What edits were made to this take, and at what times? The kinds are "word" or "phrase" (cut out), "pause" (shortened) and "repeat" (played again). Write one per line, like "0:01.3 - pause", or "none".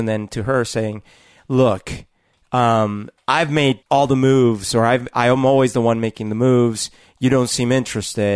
0:03.8 - pause

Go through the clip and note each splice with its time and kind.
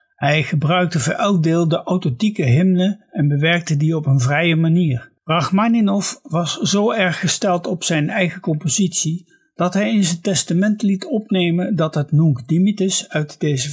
0:05.2 - pause

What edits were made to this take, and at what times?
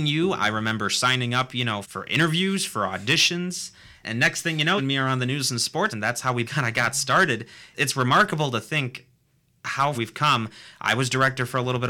0:01.8 - word
0:04.0 - word
0:04.8 - word
0:05.9 - word
0:06.4 - word
0:07.7 - word
0:09.9 - word

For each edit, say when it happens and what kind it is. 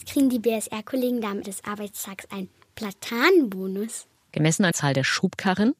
0:01.4 - word
0:04.7 - word

